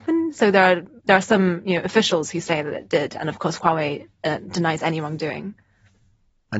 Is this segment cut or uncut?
cut